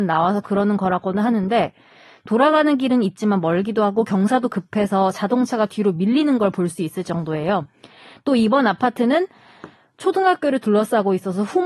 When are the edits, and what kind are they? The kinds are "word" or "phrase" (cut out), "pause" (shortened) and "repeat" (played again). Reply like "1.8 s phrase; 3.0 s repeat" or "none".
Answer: none